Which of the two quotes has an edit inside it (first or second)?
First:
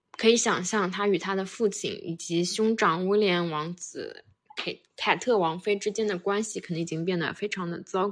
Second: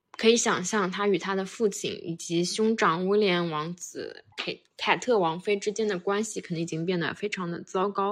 second